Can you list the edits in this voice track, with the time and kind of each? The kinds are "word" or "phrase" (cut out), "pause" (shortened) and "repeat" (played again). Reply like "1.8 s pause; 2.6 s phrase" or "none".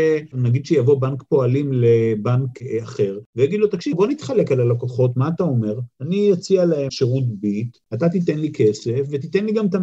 3.9 s word; 6.9 s word